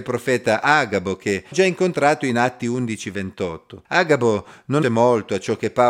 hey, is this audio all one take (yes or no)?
no